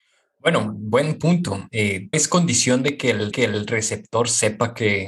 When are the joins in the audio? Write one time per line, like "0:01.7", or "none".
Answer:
0:02.1
0:03.3